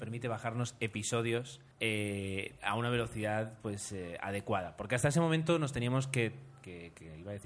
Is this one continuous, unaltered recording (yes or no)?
no